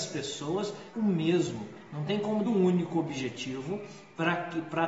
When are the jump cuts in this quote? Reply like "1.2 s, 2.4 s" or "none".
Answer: 0.9 s, 2.4 s

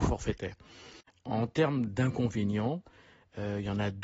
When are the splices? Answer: none

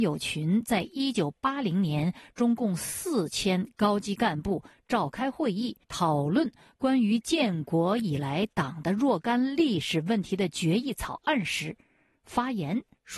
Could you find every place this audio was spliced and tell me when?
5.8 s

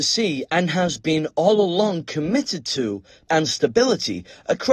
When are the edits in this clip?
3.3 s

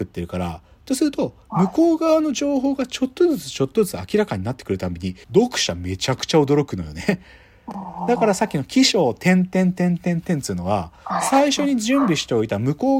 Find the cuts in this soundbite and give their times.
5.2 s

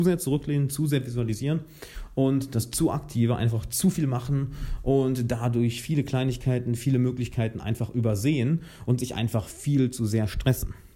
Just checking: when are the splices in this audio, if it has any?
none

